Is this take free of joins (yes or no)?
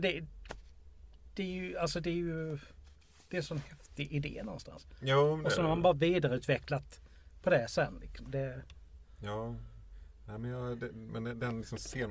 yes